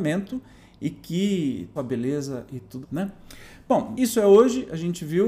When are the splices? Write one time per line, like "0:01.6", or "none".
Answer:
0:01.8
0:02.8
0:03.9